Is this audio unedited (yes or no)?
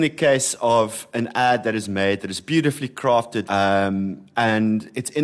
no